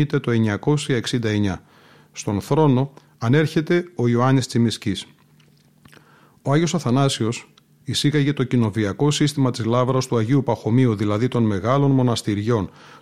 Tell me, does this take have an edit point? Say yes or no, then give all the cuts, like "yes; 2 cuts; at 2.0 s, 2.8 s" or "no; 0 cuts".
no; 0 cuts